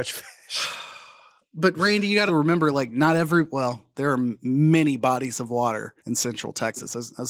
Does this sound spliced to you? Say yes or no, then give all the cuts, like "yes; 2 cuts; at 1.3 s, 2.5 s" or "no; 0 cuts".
yes; 2 cuts; at 2.3 s, 6.0 s